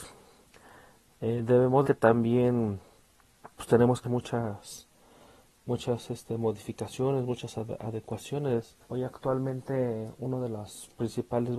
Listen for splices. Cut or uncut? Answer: cut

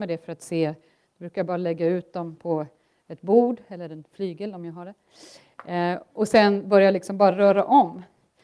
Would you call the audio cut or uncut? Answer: uncut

